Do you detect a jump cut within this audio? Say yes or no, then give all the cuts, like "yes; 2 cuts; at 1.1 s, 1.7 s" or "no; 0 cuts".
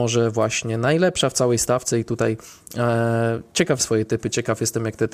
yes; 1 cut; at 3.8 s